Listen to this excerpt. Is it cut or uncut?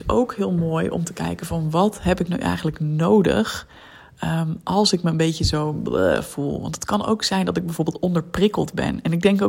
uncut